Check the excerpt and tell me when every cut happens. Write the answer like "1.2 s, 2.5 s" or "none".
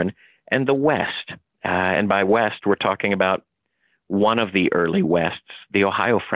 none